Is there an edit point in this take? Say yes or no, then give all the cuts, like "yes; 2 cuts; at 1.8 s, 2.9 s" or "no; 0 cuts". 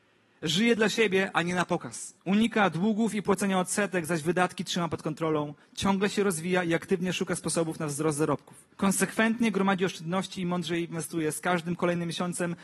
yes; 2 cuts; at 2.2 s, 8.7 s